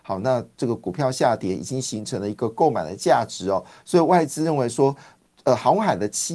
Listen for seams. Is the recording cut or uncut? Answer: uncut